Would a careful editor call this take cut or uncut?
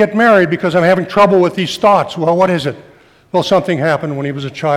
uncut